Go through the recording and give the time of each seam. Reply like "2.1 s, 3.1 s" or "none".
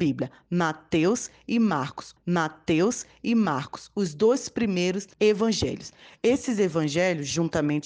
2.2 s, 5.1 s

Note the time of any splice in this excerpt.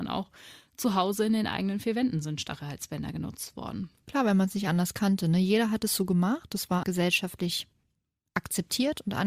6.8 s

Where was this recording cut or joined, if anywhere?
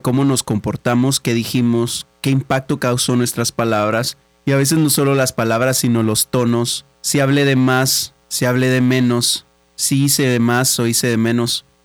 2.1 s, 4.2 s, 6.9 s, 8.2 s

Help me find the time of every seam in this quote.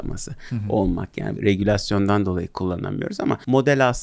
1.4 s

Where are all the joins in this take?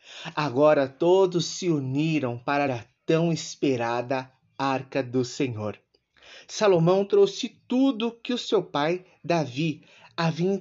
2.7 s

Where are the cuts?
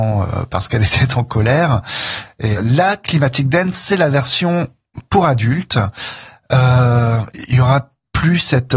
none

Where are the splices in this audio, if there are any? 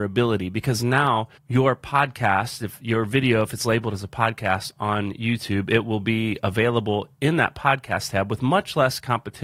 1.4 s

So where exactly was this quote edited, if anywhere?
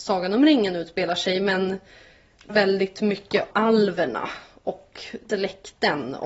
2.5 s, 3.5 s, 5.3 s

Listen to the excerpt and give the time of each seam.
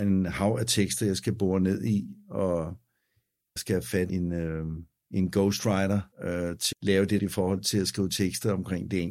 3.6 s, 4.1 s, 5.0 s, 6.1 s, 6.7 s, 7.2 s

